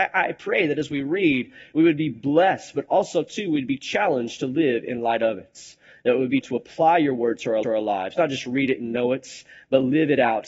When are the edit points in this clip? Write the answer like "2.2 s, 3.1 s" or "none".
6.4 s, 7.6 s